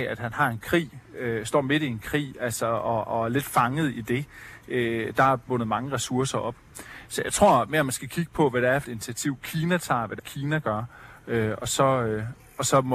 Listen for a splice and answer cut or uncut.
cut